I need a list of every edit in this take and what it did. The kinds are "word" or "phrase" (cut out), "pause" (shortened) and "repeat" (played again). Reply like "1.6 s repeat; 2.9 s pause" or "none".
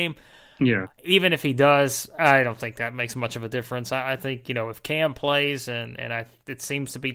none